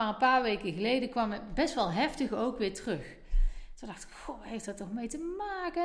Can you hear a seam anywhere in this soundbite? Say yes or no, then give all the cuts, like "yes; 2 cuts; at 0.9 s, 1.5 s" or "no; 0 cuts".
no; 0 cuts